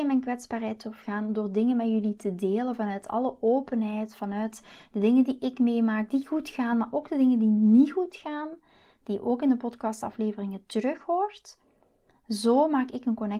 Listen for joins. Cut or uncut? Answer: uncut